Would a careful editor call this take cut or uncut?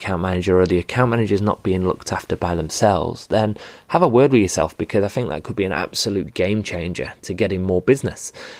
uncut